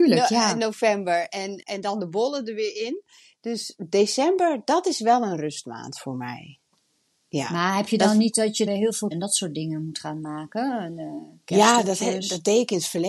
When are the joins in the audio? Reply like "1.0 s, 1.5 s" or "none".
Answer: 1.6 s, 8.7 s, 9.1 s